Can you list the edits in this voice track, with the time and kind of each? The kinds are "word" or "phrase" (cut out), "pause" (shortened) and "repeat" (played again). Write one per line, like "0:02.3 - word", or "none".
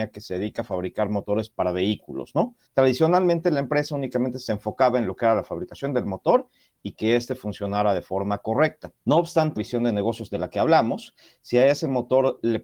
0:01.5 - word
0:02.7 - pause
0:09.0 - pause
0:09.6 - phrase